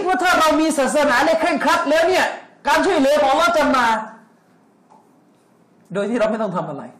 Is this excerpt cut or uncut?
uncut